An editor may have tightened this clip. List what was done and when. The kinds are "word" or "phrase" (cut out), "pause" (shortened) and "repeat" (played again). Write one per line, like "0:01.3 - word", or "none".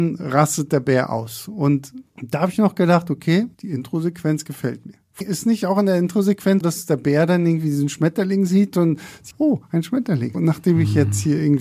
0:02.1 - pause
0:03.5 - pause
0:05.2 - word
0:06.6 - word
0:09.3 - phrase
0:10.3 - word